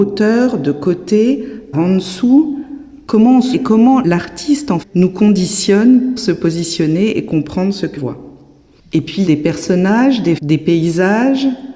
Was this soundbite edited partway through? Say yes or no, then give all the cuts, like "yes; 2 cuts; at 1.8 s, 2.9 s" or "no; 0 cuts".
yes; 7 cuts; at 1.7 s, 3.5 s, 4.8 s, 6.2 s, 8.0 s, 9.3 s, 10.4 s